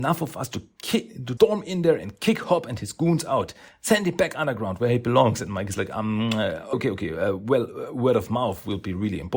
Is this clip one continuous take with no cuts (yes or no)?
no